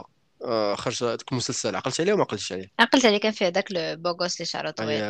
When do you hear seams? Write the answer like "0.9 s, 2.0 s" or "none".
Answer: none